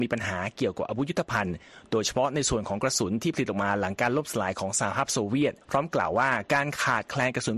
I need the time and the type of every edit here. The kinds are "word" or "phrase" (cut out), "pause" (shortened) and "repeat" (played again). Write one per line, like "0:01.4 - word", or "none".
0:05.6 - pause